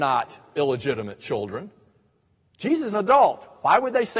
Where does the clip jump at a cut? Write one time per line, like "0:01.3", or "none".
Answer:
0:02.9